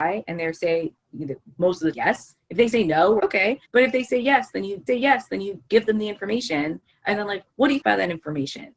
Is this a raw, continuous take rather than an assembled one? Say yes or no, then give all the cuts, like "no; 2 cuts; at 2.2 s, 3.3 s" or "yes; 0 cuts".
no; 5 cuts; at 1.9 s, 3.2 s, 3.6 s, 4.9 s, 7.8 s